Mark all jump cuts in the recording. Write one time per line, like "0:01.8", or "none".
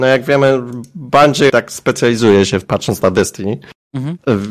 0:01.5
0:02.6